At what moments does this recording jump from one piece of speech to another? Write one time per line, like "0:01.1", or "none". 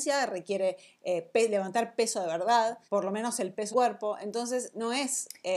0:02.9
0:03.7

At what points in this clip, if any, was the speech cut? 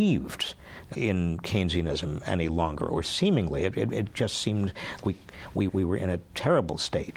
0:00.9
0:05.0
0:05.7

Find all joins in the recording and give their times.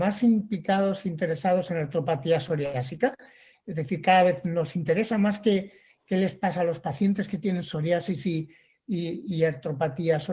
none

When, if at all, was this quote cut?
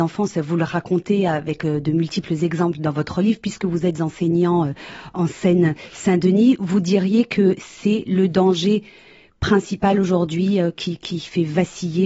none

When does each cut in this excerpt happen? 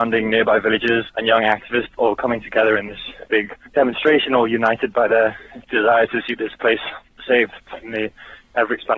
0:05.6
0:07.6

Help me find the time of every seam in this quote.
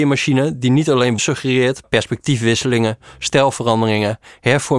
0:01.2
0:01.8

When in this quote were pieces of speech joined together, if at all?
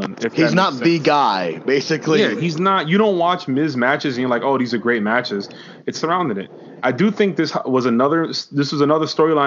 0:05.9

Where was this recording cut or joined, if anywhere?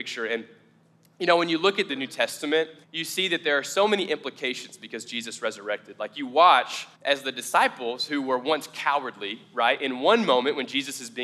0:01.9
0:02.8
0:06.9

